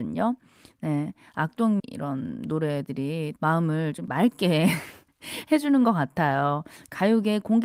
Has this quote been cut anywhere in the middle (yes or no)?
yes